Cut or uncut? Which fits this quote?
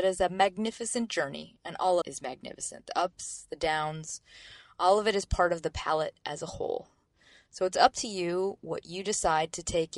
cut